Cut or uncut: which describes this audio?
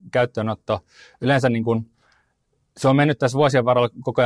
uncut